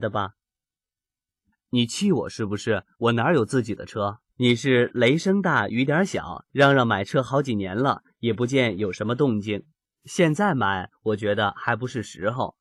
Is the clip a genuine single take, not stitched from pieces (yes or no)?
no